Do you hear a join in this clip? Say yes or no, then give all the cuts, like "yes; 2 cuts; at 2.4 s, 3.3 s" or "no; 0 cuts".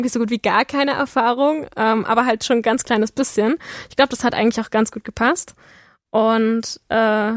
no; 0 cuts